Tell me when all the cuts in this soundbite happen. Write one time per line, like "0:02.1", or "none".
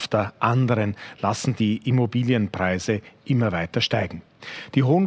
none

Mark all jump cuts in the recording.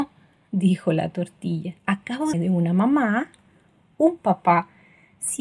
0:01.8
0:02.3

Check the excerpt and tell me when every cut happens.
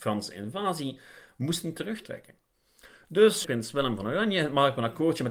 0:03.4

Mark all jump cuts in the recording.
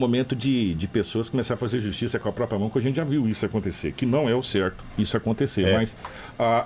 none

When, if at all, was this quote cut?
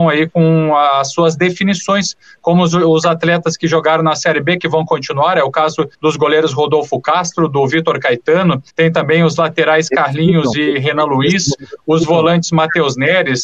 0:05.9
0:08.7

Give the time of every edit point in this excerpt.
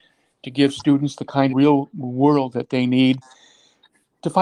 0:01.5
0:02.5

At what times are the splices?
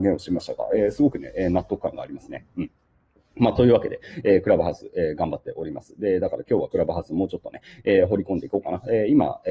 none

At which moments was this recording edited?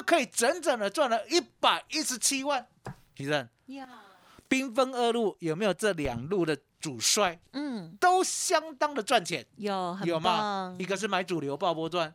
none

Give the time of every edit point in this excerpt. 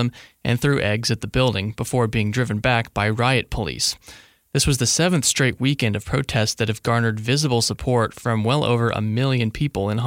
none

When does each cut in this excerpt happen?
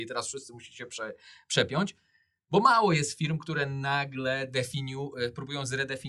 none

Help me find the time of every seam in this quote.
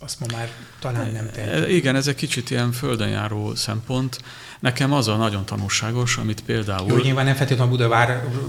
none

